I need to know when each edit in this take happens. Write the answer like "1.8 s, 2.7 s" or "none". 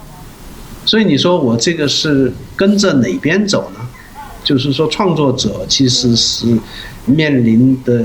7.1 s